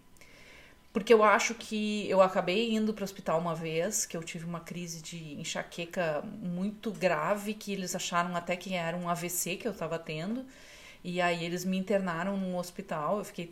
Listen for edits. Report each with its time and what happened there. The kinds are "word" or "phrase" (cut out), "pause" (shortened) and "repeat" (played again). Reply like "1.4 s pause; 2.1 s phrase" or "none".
none